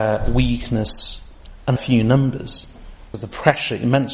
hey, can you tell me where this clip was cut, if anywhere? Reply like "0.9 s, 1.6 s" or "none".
1.8 s, 3.1 s